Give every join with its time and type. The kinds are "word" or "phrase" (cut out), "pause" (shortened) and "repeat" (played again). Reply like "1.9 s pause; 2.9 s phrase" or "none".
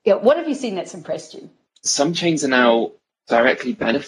none